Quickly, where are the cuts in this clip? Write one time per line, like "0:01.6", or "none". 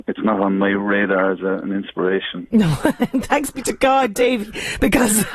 none